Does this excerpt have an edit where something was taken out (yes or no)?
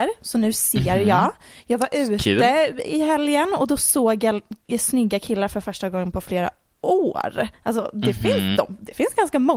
yes